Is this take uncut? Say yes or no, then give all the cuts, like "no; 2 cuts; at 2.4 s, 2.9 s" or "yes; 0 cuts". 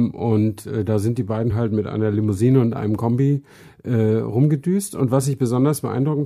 yes; 0 cuts